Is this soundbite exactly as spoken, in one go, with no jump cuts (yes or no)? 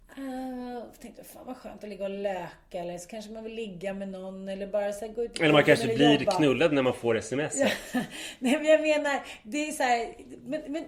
yes